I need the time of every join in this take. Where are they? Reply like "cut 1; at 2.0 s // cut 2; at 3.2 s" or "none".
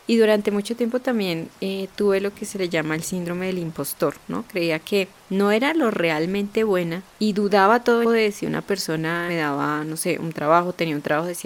cut 1; at 5.2 s // cut 2; at 7.1 s // cut 3; at 8.0 s // cut 4; at 9.3 s